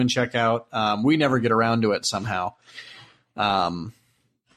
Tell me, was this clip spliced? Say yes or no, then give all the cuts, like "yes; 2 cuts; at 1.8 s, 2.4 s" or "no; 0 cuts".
no; 0 cuts